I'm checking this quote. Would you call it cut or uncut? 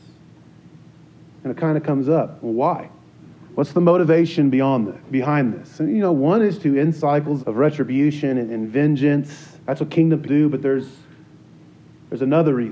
cut